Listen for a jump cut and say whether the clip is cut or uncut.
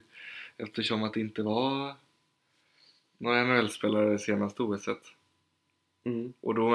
uncut